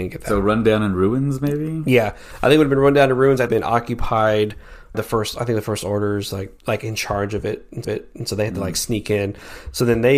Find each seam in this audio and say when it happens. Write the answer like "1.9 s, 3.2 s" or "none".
3.5 s, 4.9 s, 6.6 s, 7.8 s